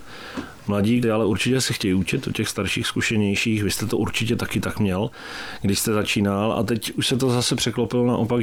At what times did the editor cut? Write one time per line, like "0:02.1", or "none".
0:01.0